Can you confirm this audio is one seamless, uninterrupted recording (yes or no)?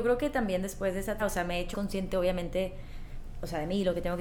no